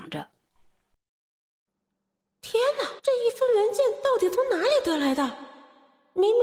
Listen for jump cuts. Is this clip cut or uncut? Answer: cut